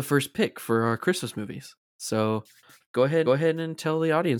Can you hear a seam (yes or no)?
yes